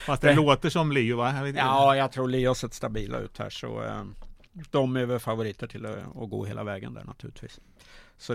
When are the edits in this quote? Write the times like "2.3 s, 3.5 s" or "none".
none